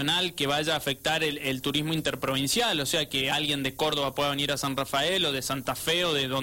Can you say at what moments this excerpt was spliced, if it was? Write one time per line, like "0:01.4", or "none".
none